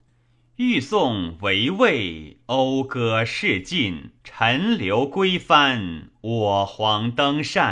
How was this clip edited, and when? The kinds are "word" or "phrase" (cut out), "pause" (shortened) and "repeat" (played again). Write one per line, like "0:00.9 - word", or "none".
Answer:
0:04.2 - pause